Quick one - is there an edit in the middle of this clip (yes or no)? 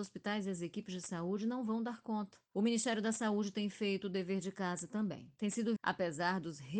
yes